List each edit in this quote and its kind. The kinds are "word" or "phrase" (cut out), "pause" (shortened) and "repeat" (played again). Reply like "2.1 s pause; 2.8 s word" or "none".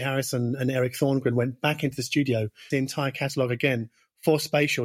2.7 s word